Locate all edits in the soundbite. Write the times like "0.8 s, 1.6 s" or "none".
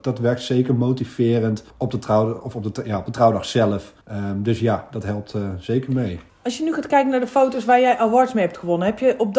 1.7 s, 4.0 s, 6.3 s